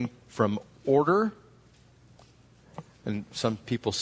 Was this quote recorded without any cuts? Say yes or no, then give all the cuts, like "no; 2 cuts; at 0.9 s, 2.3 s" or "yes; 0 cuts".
yes; 0 cuts